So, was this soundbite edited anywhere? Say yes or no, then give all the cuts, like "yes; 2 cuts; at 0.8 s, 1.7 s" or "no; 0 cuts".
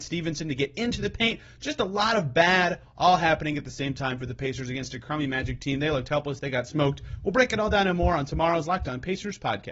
no; 0 cuts